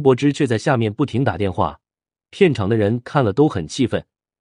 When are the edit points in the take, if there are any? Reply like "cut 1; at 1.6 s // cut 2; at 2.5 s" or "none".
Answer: none